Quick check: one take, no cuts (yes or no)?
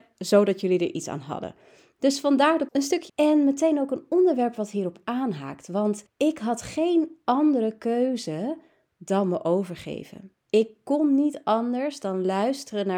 no